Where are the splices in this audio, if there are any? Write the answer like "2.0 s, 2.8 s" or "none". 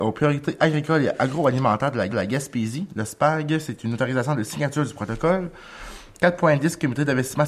2.1 s